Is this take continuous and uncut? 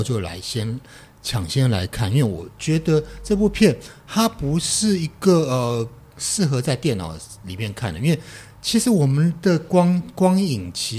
yes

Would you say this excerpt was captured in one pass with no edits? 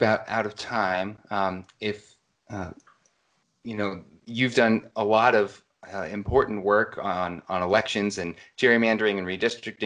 yes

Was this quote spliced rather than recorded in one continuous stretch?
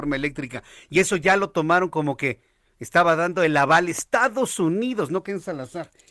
no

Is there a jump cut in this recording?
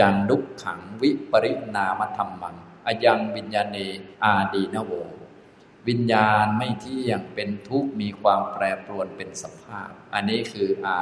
yes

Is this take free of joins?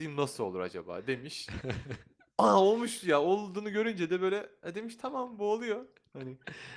yes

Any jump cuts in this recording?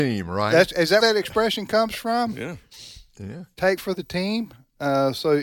yes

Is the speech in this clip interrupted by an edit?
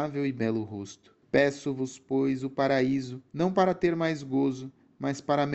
yes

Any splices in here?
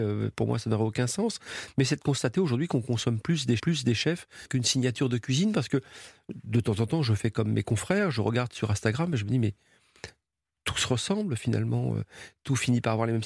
yes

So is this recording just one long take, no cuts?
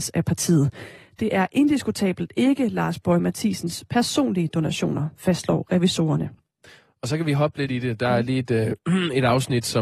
yes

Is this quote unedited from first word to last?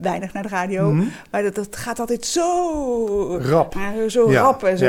yes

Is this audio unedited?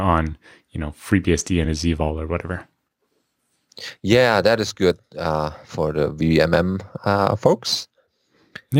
yes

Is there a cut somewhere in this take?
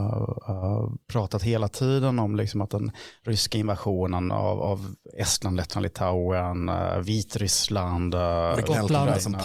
yes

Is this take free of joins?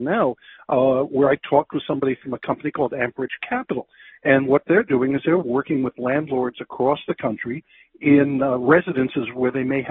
yes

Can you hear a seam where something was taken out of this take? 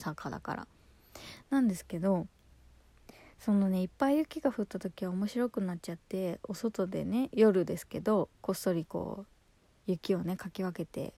no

